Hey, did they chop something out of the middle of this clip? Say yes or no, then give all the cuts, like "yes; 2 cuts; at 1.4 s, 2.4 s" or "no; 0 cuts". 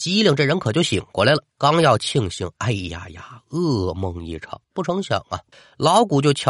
yes; 3 cuts; at 1.5 s, 4.6 s, 5.5 s